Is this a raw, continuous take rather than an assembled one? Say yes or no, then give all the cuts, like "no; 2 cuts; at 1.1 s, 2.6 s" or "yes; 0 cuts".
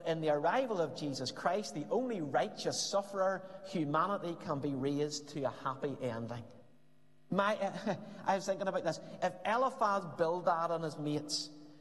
yes; 0 cuts